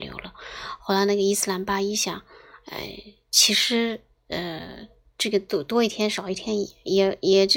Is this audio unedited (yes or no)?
yes